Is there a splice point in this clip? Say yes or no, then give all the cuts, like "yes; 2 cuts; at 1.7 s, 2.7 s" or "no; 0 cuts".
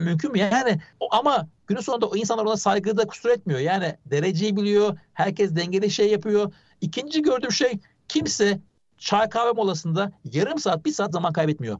no; 0 cuts